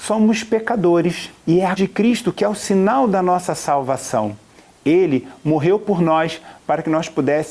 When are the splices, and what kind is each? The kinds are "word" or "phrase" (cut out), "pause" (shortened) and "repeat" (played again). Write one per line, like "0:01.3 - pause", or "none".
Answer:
0:01.4 - pause
0:01.8 - word